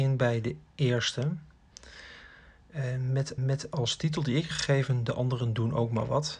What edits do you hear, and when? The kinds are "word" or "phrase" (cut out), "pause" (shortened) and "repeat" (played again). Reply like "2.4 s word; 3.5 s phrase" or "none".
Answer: 3.4 s repeat; 4.5 s word